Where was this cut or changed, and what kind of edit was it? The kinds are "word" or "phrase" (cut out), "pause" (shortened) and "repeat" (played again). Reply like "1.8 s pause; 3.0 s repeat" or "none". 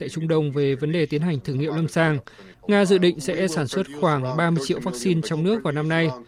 none